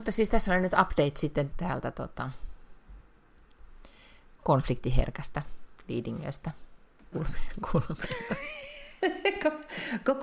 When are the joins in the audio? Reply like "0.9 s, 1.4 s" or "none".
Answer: 1.5 s, 4.4 s, 7.1 s

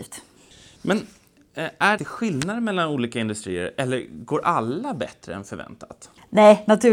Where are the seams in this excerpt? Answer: 2.0 s

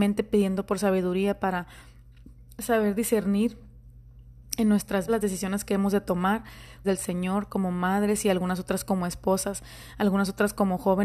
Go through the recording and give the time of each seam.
5.1 s, 6.8 s

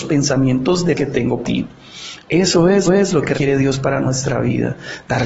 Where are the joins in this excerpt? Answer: 0.9 s, 1.4 s, 2.9 s, 3.3 s

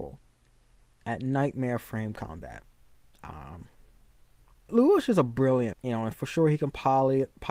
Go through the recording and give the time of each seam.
4.7 s, 5.7 s

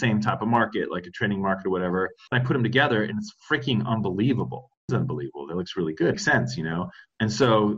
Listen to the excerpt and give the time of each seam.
2.3 s, 3.4 s, 4.9 s, 6.1 s

